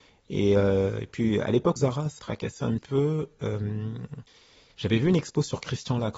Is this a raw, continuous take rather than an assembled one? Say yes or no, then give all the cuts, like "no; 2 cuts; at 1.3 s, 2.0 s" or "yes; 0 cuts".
no; 3 cuts; at 1.8 s, 2.2 s, 2.8 s